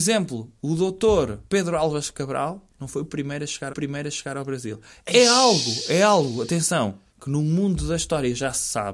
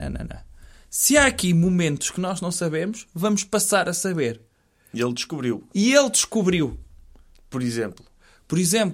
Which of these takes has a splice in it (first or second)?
first